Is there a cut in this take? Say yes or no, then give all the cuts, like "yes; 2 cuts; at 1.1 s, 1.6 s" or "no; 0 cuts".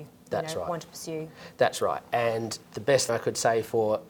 yes; 2 cuts; at 2.6 s, 3.1 s